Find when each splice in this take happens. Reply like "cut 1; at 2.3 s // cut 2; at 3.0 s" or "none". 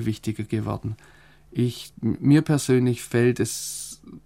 none